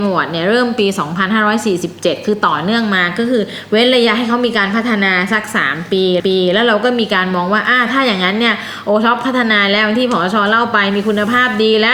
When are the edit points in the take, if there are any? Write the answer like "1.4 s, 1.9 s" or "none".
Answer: 6.2 s